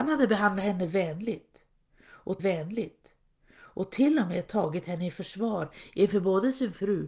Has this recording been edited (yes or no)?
yes